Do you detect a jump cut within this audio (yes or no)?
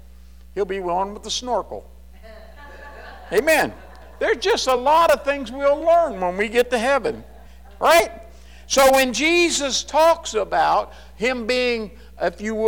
no